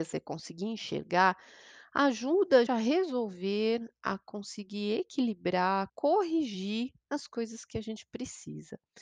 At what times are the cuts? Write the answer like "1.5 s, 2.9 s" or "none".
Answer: 2.7 s, 5.9 s